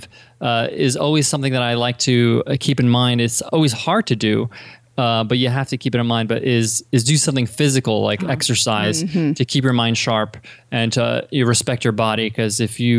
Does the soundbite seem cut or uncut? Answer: uncut